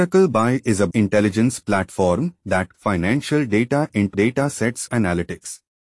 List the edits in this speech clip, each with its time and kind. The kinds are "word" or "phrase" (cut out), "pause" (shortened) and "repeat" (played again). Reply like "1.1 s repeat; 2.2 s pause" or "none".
0.9 s word; 2.7 s word; 4.1 s word; 4.9 s word